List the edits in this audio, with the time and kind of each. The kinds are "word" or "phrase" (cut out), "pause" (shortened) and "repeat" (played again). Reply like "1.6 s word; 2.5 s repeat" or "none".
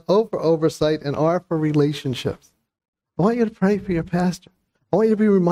none